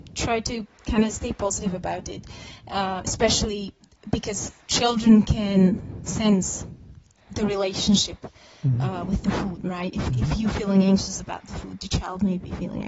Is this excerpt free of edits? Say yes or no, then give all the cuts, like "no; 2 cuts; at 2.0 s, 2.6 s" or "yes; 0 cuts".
yes; 0 cuts